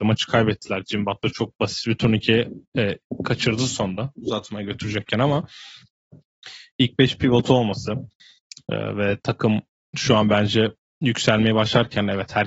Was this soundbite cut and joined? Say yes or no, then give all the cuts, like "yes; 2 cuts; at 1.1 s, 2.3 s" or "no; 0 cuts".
no; 0 cuts